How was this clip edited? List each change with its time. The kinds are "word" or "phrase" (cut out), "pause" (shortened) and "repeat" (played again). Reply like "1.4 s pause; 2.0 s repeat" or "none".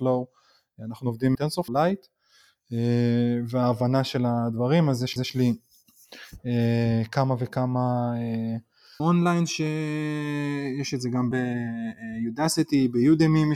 1.3 s word; 1.7 s word; 5.2 s repeat; 9.0 s word; 11.3 s phrase